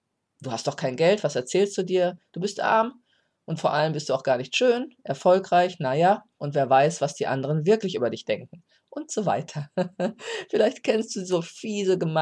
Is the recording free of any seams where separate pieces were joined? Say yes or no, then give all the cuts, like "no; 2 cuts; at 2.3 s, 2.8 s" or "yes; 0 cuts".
yes; 0 cuts